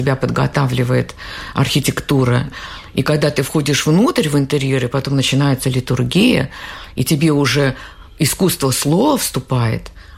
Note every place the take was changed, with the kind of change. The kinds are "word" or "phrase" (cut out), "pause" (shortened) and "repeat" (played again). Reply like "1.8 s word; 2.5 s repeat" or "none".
none